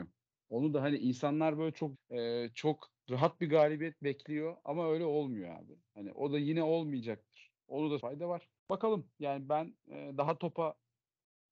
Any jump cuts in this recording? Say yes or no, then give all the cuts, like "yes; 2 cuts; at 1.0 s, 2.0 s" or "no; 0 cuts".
yes; 4 cuts; at 1.9 s, 7.6 s, 8.0 s, 8.6 s